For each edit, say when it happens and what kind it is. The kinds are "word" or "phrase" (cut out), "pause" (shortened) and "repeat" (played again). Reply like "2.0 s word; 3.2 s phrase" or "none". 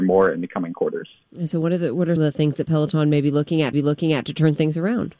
2.2 s word; 3.7 s repeat